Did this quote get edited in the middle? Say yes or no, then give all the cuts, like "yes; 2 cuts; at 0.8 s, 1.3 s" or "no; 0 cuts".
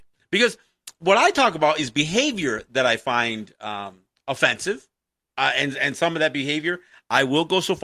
no; 0 cuts